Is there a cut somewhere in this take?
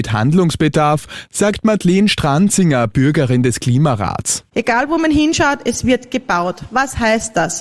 no; 0 cuts

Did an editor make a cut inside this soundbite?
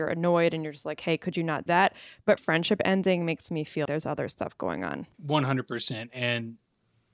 yes; 4 cuts; at 1.7 s, 2.4 s, 3.9 s, 5.1 s

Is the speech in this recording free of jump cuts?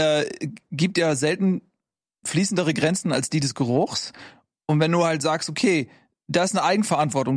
yes; 0 cuts

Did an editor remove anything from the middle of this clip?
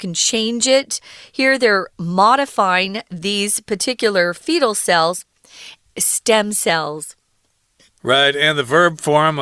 yes; 1 cut; at 5.9 s

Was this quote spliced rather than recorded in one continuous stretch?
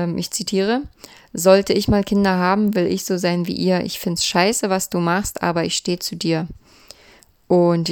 no; 0 cuts

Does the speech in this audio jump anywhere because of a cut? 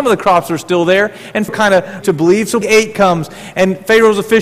yes; 3 cuts; at 1.5 s, 2.0 s, 2.6 s

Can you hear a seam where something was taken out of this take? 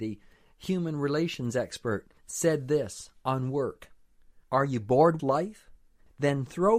yes; 3 cuts; at 2.2 s, 4.4 s, 5.2 s

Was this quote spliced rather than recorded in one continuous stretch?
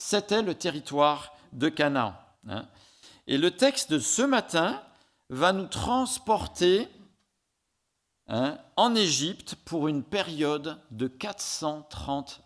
no; 0 cuts

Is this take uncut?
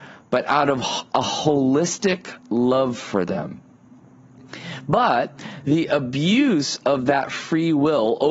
no; 1 cut; at 2.4 s

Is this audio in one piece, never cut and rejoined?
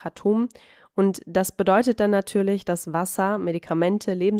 yes; 0 cuts

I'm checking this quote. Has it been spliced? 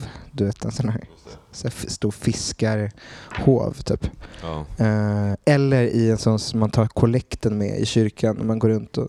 no; 0 cuts

